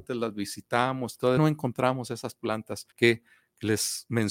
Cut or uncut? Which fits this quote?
cut